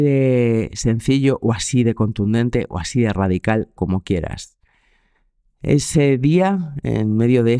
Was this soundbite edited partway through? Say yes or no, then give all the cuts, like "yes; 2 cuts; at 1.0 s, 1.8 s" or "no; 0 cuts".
yes; 1 cut; at 3.8 s